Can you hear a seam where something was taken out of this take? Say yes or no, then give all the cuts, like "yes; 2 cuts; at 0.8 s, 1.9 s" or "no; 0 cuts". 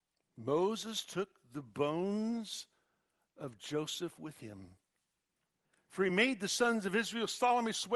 no; 0 cuts